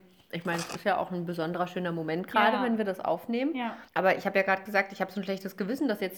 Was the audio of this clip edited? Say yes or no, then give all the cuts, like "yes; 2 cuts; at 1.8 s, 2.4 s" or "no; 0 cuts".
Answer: yes; 1 cut; at 3.9 s